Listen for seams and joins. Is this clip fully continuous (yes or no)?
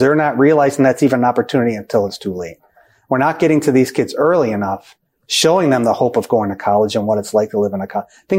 yes